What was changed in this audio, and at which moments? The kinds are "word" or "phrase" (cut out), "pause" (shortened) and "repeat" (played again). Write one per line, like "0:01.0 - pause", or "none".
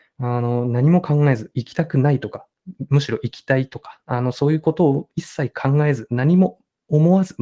none